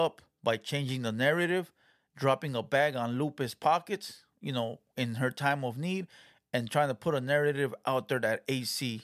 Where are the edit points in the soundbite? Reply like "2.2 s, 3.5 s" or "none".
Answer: none